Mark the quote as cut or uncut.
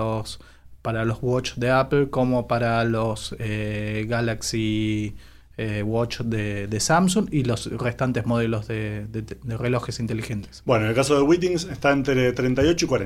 uncut